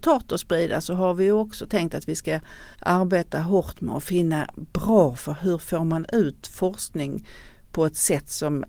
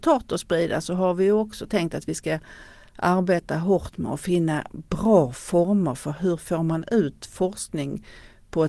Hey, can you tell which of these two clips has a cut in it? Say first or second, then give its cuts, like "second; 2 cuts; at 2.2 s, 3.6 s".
first; 2 cuts; at 2.7 s, 5.2 s